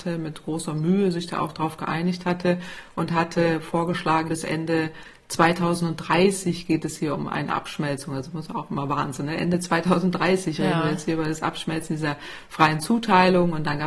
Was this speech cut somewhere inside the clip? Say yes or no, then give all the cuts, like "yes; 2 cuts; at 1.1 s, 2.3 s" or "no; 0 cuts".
yes; 1 cut; at 4.3 s